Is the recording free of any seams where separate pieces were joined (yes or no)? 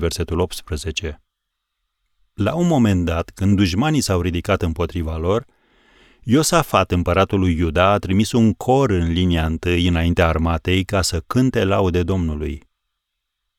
yes